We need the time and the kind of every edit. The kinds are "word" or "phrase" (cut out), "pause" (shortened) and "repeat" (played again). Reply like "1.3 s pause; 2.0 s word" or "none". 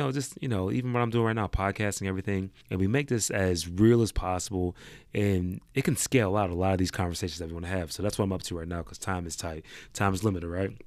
2.6 s pause